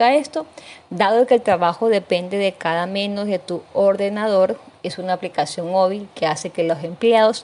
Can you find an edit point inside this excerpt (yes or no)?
no